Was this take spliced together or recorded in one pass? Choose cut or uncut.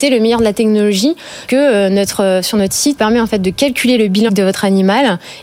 cut